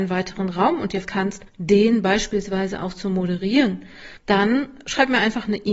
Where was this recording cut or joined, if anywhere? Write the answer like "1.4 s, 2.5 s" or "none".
1.0 s, 1.5 s, 4.2 s